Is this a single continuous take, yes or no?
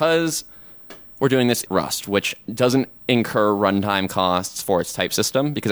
no